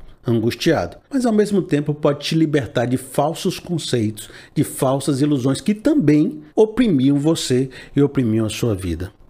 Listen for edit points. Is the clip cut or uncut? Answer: cut